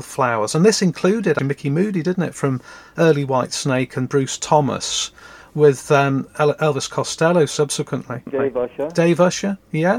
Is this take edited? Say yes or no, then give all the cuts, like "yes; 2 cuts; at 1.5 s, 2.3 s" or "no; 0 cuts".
no; 0 cuts